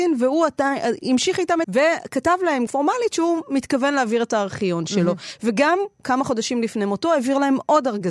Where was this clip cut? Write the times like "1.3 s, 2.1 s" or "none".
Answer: 1.6 s, 2.7 s